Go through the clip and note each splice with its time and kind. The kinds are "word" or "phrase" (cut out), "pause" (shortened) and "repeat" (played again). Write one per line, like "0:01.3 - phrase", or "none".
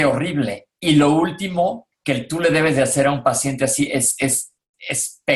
0:01.9 - pause